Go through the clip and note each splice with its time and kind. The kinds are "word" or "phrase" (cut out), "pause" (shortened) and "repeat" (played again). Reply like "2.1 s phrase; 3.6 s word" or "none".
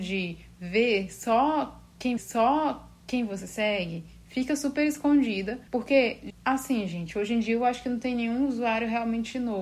2.2 s repeat; 5.7 s pause

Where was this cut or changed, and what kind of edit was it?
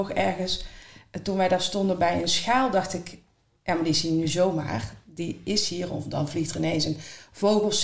none

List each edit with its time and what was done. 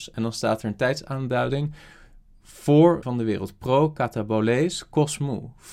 3.0 s phrase

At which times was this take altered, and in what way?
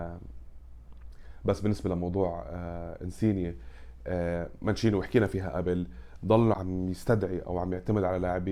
6.5 s word

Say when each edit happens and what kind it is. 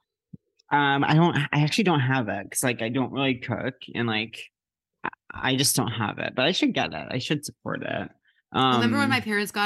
none

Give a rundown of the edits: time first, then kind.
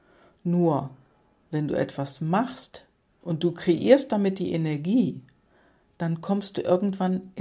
none

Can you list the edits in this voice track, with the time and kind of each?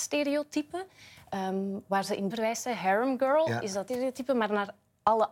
2.3 s word; 3.9 s word

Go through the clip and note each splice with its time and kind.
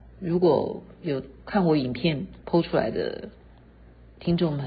none

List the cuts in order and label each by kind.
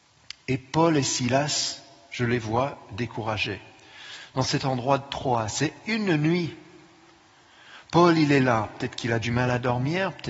none

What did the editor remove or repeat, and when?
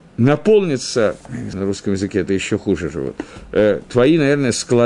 1.2 s pause; 1.5 s word

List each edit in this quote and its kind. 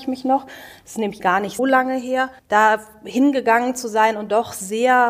1.2 s word; 1.6 s word; 2.4 s pause

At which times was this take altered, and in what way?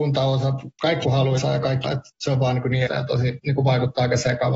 1.0 s word; 1.4 s word; 1.8 s word; 2.9 s word

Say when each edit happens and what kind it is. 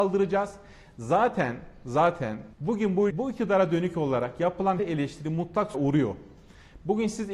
2.5 s pause; 3.1 s word; 4.8 s word; 5.7 s phrase

